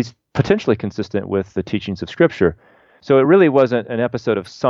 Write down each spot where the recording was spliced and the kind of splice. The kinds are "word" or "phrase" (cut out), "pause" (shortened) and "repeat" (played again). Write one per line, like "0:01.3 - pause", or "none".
none

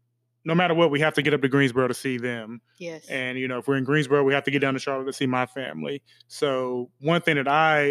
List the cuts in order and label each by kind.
none

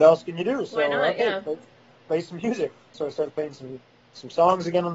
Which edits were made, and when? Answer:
none

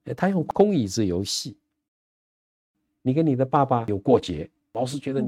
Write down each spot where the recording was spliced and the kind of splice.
none

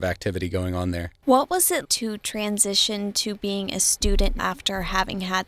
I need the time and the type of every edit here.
0:01.2 - pause
0:01.8 - word
0:04.4 - word

